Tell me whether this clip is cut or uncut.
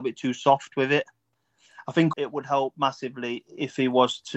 cut